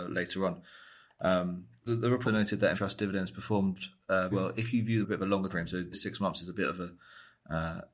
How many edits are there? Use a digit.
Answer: 7